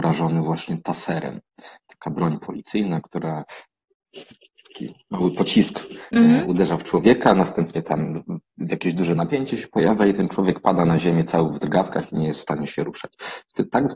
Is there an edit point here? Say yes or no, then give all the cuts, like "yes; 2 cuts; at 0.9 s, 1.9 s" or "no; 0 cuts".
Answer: no; 0 cuts